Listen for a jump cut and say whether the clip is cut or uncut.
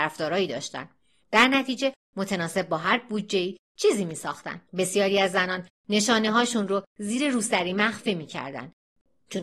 cut